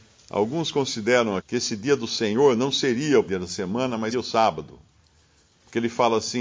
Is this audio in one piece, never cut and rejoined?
no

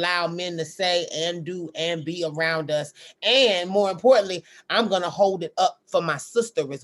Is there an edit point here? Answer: no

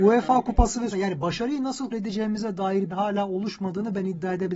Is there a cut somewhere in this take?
yes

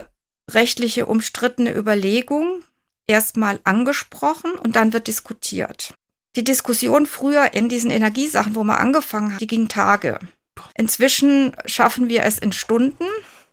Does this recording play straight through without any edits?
no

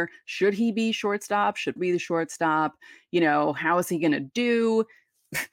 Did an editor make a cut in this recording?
yes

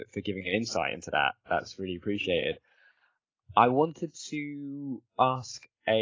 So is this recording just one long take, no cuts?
yes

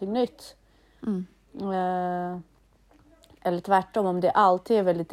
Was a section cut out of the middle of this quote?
no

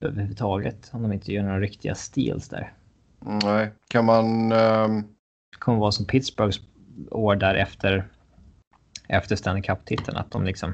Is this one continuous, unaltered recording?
no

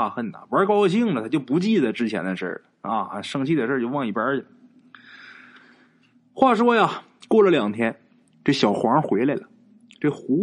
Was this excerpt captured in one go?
yes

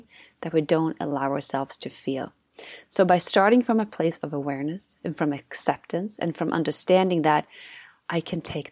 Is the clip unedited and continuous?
yes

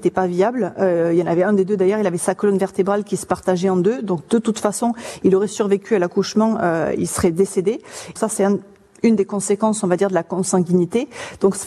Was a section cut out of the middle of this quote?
yes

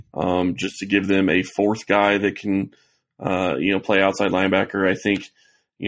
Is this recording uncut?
yes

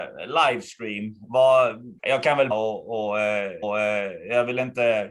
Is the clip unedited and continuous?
no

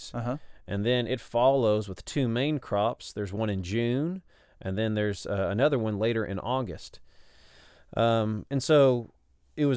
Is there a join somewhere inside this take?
no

